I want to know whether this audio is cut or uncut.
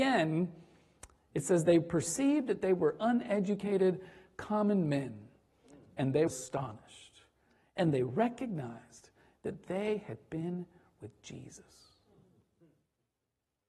cut